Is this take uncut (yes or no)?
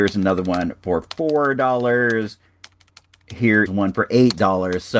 no